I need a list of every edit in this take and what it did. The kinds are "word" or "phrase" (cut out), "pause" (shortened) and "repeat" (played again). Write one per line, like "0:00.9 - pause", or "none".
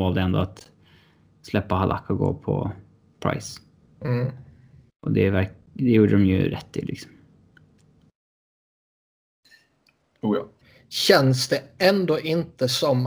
0:10.6 - pause